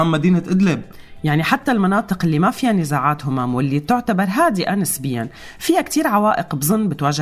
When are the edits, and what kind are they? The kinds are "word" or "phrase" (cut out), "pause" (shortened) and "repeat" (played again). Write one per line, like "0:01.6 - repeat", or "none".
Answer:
none